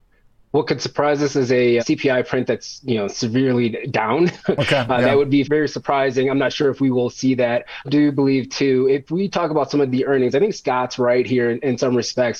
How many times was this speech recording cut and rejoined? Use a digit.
3